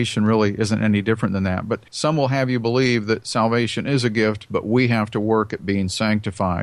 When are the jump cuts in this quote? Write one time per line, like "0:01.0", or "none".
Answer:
0:01.9